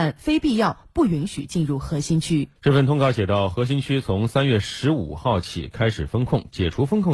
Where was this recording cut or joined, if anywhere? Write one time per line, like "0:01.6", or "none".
0:02.6